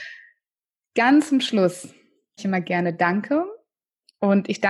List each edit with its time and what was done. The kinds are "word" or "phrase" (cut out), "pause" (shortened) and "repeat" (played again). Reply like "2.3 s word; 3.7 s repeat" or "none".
2.4 s word